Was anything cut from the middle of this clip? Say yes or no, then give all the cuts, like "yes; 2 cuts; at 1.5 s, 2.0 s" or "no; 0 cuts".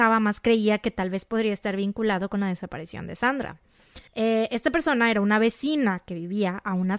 yes; 1 cut; at 4.1 s